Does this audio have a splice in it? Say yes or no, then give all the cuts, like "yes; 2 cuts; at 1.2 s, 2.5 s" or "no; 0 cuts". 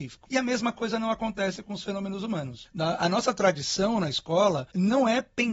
no; 0 cuts